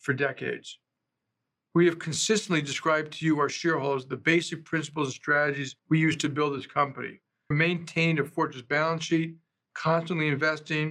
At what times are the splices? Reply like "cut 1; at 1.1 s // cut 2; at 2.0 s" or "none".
cut 1; at 5.8 s // cut 2; at 7.5 s